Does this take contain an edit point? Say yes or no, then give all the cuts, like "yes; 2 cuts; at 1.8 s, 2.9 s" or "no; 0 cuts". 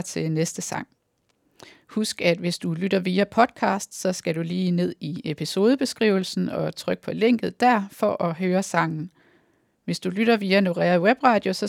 no; 0 cuts